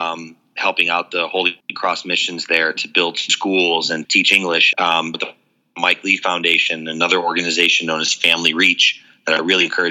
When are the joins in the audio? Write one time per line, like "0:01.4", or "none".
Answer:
0:04.0
0:04.7
0:05.1